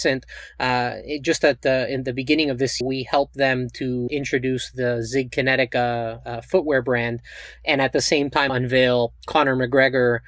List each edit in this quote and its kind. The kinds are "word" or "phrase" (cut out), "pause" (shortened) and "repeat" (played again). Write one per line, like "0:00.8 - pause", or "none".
0:02.8 - word
0:04.1 - word
0:08.5 - word

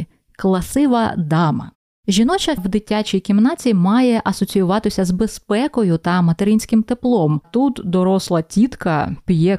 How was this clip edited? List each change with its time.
0:02.6 - word
0:07.4 - word

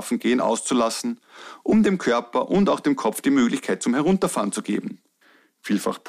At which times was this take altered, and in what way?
none

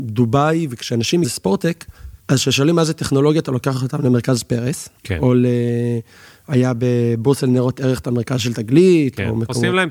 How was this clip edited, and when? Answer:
0:01.2 - phrase
0:02.2 - pause
0:05.0 - pause

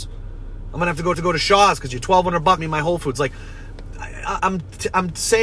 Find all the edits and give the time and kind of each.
0:01.1 - repeat
0:02.6 - phrase
0:04.4 - word

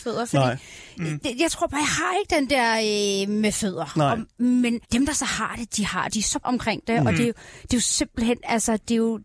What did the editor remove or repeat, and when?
0:04.8 - pause
0:06.1 - phrase
0:06.4 - word

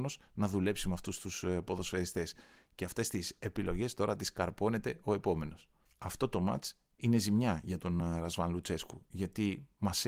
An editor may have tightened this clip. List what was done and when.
none

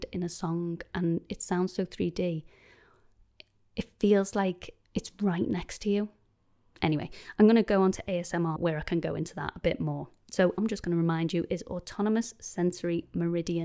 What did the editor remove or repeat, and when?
0:04.8 - pause
0:08.6 - word
0:10.6 - word

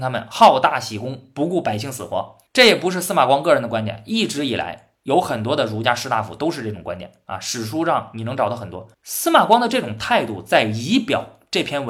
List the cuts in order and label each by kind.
0:02.5 - pause
0:08.9 - pause

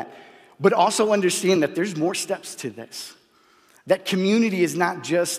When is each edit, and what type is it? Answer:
none

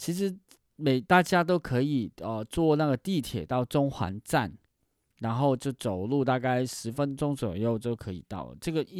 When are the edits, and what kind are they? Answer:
none

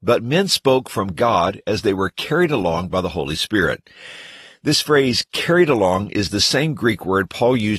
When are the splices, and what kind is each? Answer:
none

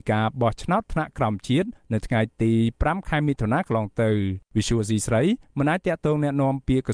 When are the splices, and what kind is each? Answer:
0:04.5 - pause

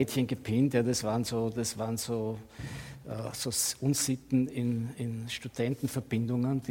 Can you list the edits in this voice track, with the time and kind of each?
none

